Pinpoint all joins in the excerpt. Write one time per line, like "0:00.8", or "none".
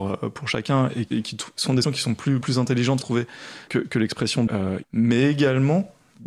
0:01.1
0:01.8
0:02.4
0:03.0
0:03.7
0:04.5
0:04.8